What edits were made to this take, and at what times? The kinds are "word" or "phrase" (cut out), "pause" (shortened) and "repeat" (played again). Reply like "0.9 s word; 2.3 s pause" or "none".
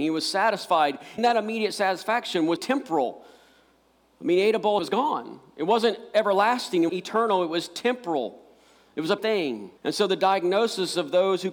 1.2 s word; 2.6 s word; 4.8 s phrase; 6.9 s word; 9.2 s word; 9.8 s pause